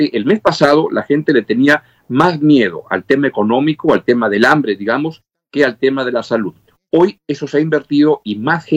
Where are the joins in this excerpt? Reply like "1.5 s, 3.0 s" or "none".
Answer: none